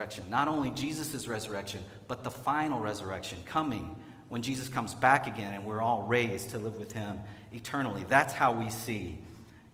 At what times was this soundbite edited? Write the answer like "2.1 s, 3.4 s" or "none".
none